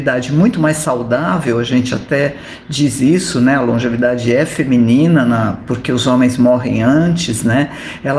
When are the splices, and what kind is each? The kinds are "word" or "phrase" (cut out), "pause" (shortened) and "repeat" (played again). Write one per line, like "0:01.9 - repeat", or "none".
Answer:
none

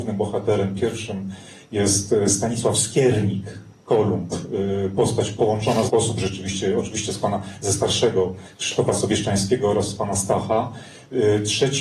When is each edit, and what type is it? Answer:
0:05.9 - word

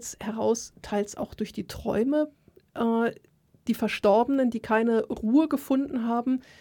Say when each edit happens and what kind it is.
none

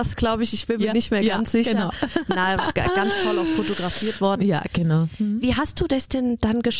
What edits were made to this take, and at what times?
none

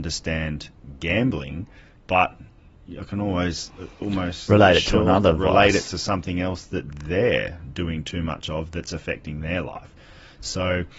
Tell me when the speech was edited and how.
none

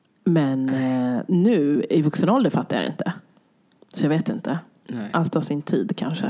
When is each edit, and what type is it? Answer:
none

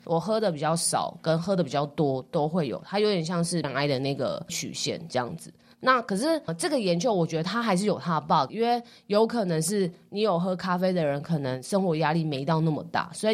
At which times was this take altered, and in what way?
0:03.6 - word
0:04.5 - word
0:06.5 - word
0:08.5 - word

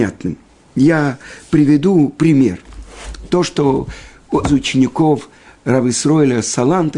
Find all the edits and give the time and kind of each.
0:04.4 - word

